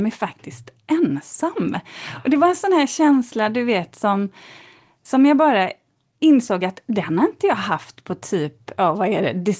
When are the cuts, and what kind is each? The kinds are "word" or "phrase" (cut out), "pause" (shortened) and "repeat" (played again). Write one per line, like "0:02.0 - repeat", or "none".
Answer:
none